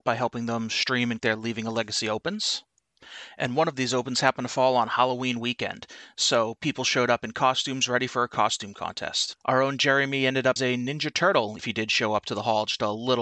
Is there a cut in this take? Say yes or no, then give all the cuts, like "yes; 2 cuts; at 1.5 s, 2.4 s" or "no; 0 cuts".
yes; 4 cuts; at 1.2 s, 9.4 s, 10.6 s, 11.6 s